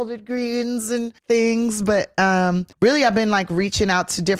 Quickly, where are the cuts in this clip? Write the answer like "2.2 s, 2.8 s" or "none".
1.2 s, 2.7 s